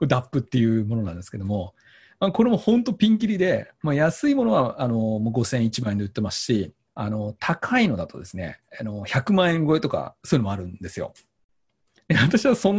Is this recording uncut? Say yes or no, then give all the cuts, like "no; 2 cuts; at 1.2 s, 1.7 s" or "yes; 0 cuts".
no; 2 cuts; at 6.9 s, 8.7 s